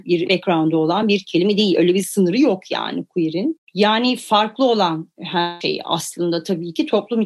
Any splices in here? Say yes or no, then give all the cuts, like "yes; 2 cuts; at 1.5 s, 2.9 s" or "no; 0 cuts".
no; 0 cuts